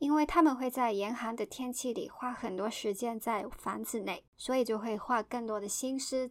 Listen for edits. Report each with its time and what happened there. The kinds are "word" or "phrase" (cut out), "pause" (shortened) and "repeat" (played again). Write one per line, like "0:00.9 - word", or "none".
0:04.3 - pause